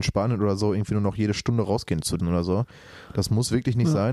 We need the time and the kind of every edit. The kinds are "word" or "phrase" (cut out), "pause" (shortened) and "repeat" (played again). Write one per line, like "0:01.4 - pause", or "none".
0:02.2 - word